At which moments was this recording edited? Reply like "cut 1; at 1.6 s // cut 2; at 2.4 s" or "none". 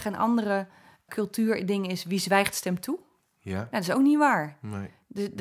cut 1; at 1.1 s